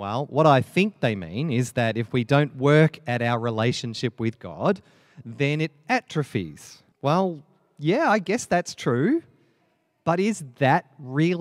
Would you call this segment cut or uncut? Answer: cut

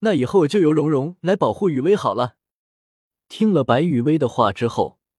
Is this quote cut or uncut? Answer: uncut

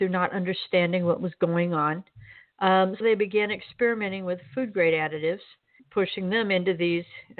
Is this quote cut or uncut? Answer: cut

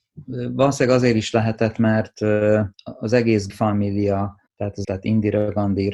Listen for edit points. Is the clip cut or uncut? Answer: cut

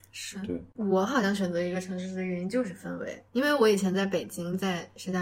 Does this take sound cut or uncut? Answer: cut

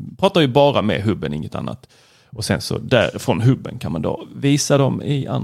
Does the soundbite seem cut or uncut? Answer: uncut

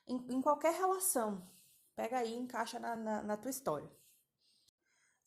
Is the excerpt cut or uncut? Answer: uncut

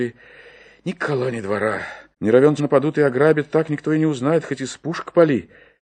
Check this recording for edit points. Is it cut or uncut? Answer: cut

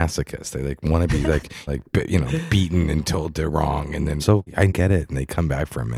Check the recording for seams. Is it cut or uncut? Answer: cut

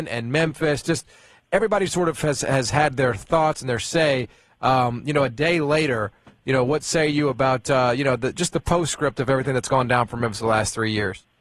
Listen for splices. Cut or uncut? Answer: uncut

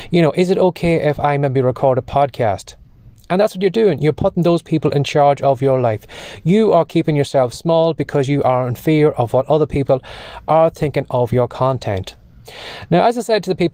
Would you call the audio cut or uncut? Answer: uncut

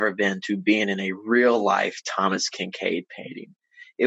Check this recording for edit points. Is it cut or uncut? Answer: uncut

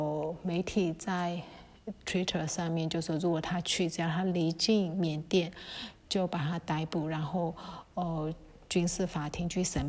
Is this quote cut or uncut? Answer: uncut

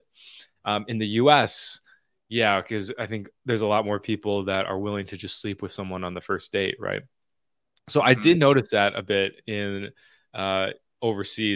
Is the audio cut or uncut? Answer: uncut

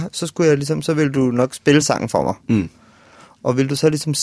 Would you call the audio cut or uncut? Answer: uncut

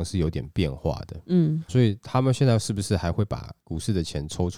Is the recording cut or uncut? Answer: cut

